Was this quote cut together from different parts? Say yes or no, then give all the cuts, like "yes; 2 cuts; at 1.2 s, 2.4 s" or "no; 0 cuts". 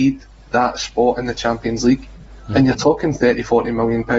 no; 0 cuts